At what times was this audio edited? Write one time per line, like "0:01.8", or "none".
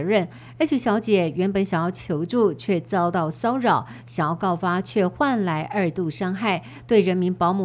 none